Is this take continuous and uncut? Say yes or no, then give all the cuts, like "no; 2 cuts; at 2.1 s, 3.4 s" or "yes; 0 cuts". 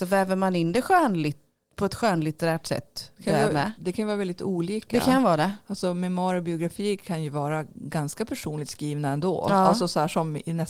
yes; 0 cuts